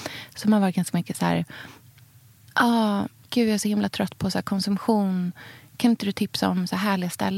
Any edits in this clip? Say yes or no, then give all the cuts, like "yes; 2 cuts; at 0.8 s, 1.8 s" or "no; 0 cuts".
yes; 1 cut; at 3.3 s